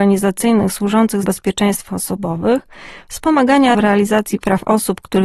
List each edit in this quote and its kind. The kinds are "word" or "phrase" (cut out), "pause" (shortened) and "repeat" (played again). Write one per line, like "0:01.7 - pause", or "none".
0:01.2 - word
0:01.9 - word
0:03.7 - word